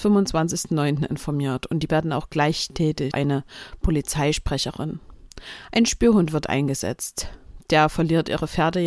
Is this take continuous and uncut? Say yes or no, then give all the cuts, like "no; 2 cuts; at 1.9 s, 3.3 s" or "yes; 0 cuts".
no; 2 cuts; at 1.9 s, 3.1 s